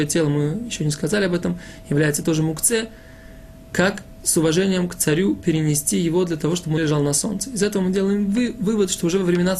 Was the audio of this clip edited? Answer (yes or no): yes